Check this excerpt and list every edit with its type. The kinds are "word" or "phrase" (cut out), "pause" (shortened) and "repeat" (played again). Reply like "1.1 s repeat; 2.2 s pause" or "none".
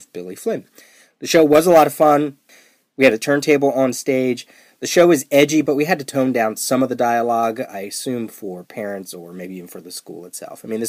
none